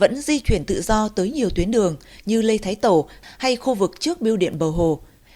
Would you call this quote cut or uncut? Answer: uncut